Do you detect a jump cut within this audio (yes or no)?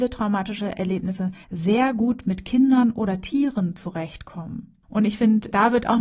yes